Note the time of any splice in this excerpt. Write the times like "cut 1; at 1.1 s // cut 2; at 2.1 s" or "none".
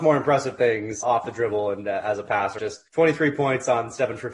cut 1; at 1.0 s // cut 2; at 2.6 s